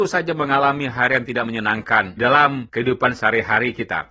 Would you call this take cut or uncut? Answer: cut